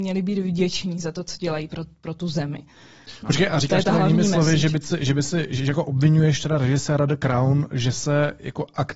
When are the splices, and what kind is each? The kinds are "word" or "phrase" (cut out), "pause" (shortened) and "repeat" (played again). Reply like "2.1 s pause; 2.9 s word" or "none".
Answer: none

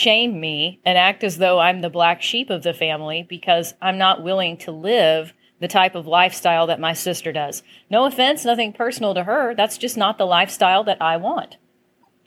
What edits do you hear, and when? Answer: none

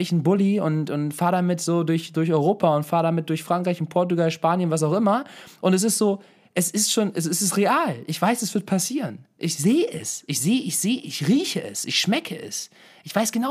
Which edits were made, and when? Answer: none

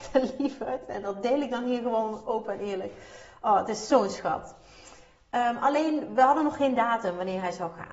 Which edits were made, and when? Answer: none

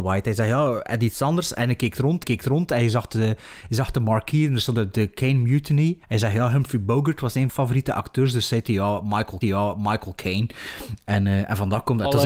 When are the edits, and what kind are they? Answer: 2.2 s repeat; 6.0 s pause; 7.5 s phrase; 9.4 s repeat

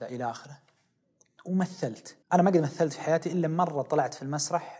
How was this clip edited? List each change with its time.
2.2 s pause

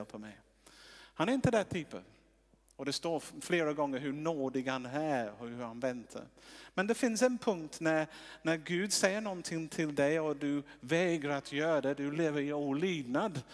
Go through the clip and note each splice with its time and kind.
none

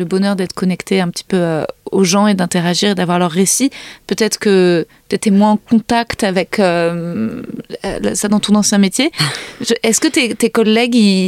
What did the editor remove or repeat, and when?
none

